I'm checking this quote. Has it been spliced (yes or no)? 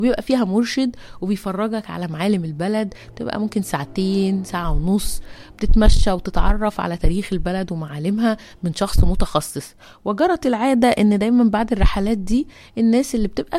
no